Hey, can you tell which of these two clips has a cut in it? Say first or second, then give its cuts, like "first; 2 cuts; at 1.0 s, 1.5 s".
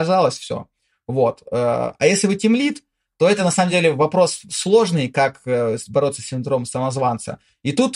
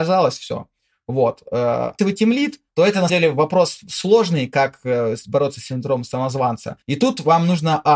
second; 4 cuts; at 2.0 s, 2.7 s, 3.1 s, 6.8 s